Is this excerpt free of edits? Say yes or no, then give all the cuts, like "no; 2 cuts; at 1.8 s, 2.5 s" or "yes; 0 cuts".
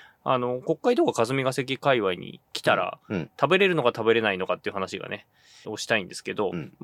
no; 2 cuts; at 2.4 s, 5.6 s